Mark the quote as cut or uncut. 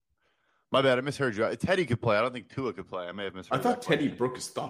uncut